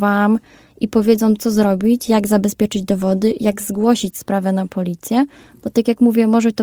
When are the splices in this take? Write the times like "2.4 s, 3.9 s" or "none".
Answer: none